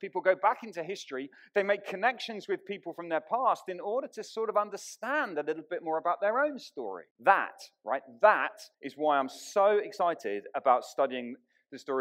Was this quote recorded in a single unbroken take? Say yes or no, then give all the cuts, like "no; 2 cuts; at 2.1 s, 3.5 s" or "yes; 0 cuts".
no; 2 cuts; at 7.1 s, 8.7 s